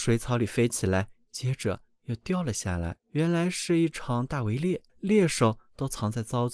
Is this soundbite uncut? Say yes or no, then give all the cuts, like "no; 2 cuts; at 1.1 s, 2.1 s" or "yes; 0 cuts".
no; 2 cuts; at 3.0 s, 4.9 s